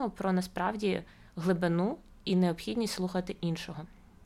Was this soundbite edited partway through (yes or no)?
no